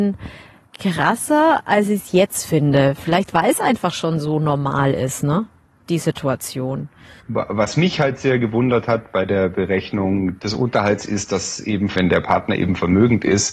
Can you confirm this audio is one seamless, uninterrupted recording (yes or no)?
yes